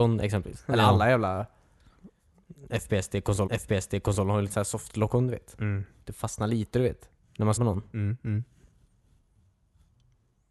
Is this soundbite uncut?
no; 3 cuts; at 3.5 s, 7.2 s, 7.6 s

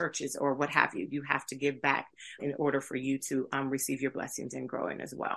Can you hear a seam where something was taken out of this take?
yes; 1 cut; at 2.4 s

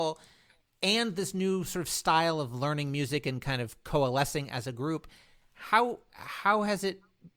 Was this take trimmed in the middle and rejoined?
no; 0 cuts

